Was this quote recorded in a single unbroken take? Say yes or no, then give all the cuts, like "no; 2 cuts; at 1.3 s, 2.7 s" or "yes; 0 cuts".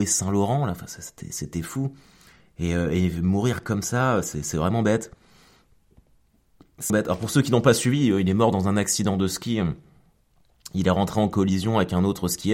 no; 1 cut; at 6.9 s